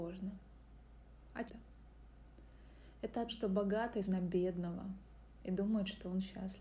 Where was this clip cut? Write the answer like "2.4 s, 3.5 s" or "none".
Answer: 1.5 s, 3.3 s, 4.0 s